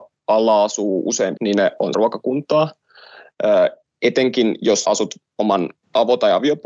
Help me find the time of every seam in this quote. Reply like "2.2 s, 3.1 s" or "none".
1.4 s, 1.9 s, 4.8 s